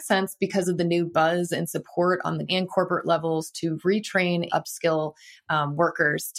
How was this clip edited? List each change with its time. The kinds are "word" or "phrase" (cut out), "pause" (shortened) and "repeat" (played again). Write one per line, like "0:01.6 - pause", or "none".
0:02.5 - word
0:04.5 - word